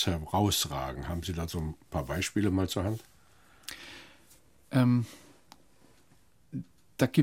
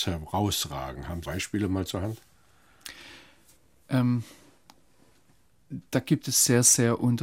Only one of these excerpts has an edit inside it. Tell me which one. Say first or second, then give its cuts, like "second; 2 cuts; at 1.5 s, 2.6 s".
second; 2 cuts; at 1.2 s, 5.9 s